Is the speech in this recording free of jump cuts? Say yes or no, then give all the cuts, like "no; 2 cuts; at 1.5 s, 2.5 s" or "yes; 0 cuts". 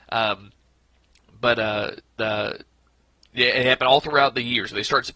no; 1 cut; at 2.2 s